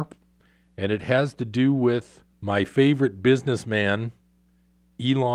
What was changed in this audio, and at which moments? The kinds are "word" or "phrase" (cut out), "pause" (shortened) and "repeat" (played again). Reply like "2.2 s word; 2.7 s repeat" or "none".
2.3 s pause